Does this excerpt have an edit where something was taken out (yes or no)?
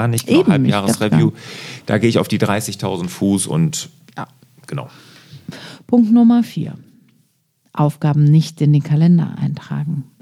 no